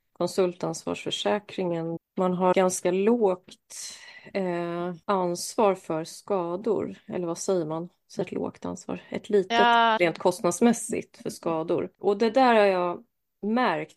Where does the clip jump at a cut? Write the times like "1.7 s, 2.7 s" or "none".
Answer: 2.0 s, 2.5 s, 5.0 s, 8.2 s, 10.0 s, 11.9 s